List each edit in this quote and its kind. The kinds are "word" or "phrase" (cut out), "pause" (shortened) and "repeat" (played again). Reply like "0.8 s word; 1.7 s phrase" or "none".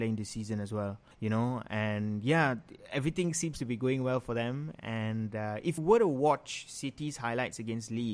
1.1 s pause; 5.8 s word